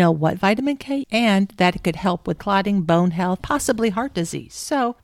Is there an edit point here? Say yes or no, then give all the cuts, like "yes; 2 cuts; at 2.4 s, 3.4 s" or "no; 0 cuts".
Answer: yes; 3 cuts; at 1.0 s, 2.4 s, 3.4 s